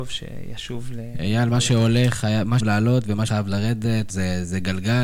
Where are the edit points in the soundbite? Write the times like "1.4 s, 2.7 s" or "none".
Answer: 2.6 s, 3.3 s, 4.1 s